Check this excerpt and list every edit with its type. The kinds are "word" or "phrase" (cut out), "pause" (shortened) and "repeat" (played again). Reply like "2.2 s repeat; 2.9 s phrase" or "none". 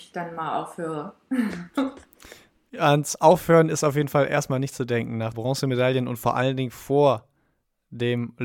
5.3 s word